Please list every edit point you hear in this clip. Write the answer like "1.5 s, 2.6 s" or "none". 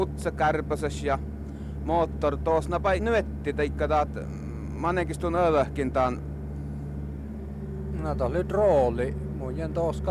3.0 s